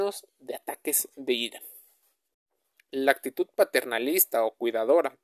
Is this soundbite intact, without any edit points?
yes; 0 cuts

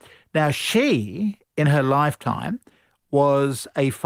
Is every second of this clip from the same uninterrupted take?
no; 1 cut; at 1.4 s

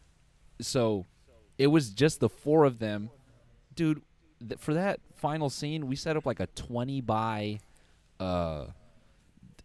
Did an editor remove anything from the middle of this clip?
no; 0 cuts

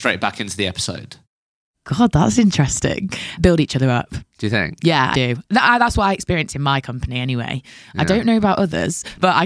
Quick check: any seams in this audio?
yes; 1 cut; at 5.1 s

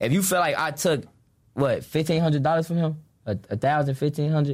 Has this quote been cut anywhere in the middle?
no; 0 cuts

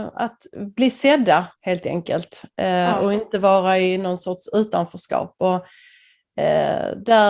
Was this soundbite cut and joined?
yes; 1 cut; at 1.5 s

